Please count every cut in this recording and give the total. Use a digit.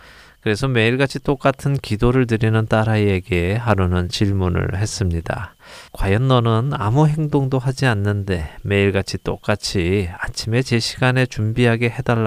1